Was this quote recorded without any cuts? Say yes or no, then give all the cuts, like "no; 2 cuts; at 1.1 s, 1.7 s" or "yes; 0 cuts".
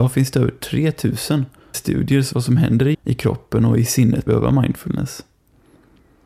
no; 4 cuts; at 1.7 s, 2.3 s, 2.9 s, 4.3 s